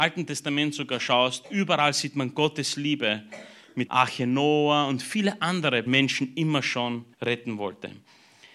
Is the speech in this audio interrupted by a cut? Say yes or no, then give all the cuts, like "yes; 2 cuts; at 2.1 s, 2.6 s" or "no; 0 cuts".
yes; 3 cuts; at 3.9 s, 5.9 s, 7.1 s